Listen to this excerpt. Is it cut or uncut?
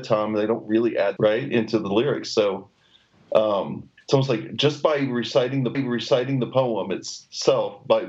cut